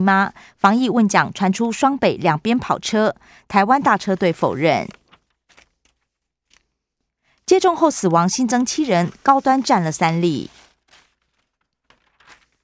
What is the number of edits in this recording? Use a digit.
0